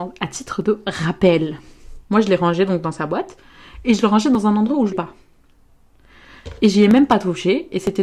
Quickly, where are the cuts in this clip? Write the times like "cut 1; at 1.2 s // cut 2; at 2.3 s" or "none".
cut 1; at 2.0 s // cut 2; at 4.9 s